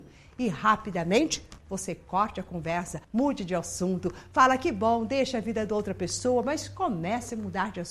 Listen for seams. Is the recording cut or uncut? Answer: cut